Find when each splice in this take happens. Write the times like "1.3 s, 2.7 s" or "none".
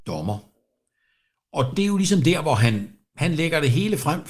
none